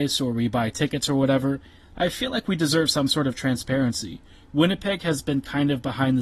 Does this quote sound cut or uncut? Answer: uncut